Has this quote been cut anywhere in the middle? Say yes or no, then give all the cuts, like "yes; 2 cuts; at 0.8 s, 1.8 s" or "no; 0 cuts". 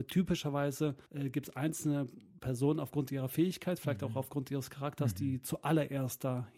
yes; 1 cut; at 1.1 s